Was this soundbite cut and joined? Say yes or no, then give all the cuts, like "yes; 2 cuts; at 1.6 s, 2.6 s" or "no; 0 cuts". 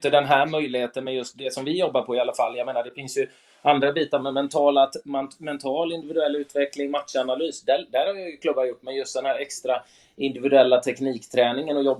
no; 0 cuts